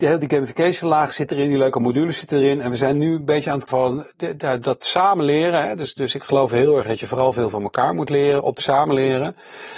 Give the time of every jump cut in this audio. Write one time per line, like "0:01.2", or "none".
0:03.7
0:04.6
0:08.6